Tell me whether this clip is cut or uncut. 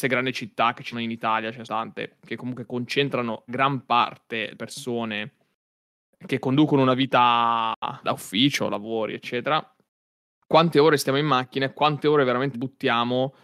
cut